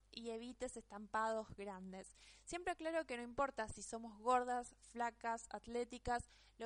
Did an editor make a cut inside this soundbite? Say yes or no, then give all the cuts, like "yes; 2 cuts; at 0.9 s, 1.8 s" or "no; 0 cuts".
no; 0 cuts